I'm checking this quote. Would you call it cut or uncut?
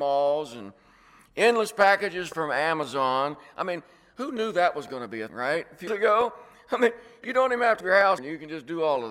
cut